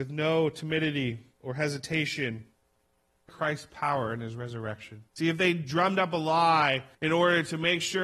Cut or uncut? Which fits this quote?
cut